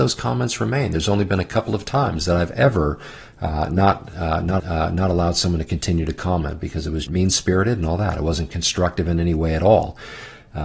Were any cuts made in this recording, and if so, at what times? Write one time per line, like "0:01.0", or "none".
0:04.6
0:07.1